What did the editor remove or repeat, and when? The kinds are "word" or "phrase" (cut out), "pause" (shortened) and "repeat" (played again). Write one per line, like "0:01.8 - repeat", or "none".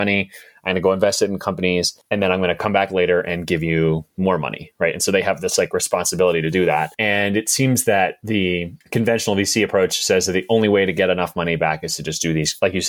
0:02.0 - pause
0:06.9 - pause
0:08.8 - pause